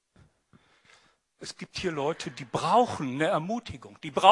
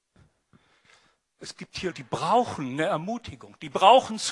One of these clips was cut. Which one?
second; 1 cut; at 1.9 s

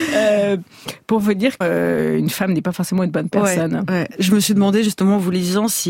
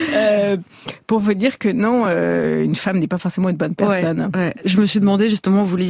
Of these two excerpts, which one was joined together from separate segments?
first; 1 cut; at 1.6 s

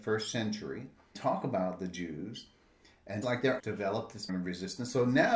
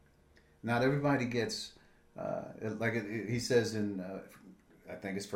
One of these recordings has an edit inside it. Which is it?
first; 4 cuts; at 1.1 s, 3.2 s, 3.6 s, 4.3 s

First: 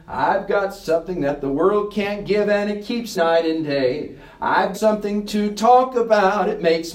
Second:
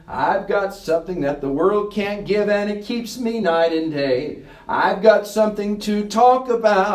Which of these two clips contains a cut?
first; 2 cuts; at 3.1 s, 4.7 s

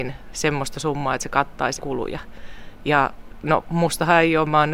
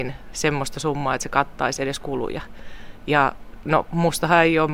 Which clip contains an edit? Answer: first; 1 cut; at 1.8 s

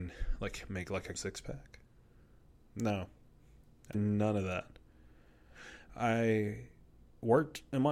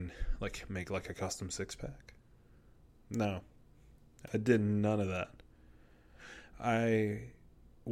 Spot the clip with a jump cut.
first; 2 cuts; at 1.1 s, 3.9 s

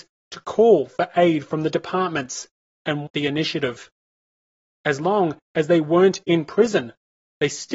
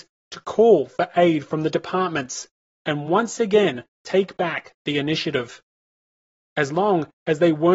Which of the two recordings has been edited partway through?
first; 1 cut; at 3.1 s

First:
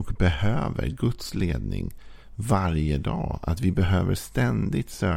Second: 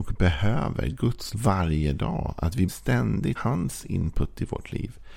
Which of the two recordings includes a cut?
second; 3 cuts; at 1.3 s, 2.7 s, 3.4 s

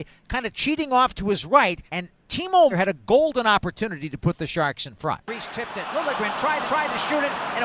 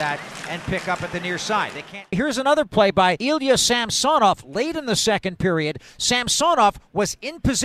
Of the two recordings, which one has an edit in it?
first; 4 cuts; at 1.9 s, 2.7 s, 5.2 s, 6.6 s

